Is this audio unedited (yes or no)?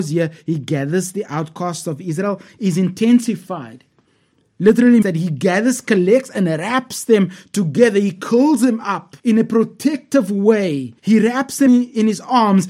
no